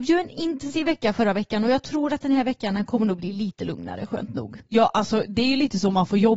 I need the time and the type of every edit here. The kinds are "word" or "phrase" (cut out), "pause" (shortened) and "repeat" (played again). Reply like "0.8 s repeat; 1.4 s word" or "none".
none